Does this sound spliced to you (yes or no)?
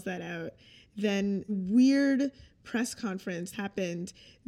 yes